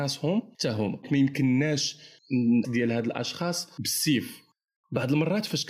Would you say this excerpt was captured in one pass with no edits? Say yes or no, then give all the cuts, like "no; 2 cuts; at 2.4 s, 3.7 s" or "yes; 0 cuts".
no; 2 cuts; at 1.0 s, 2.6 s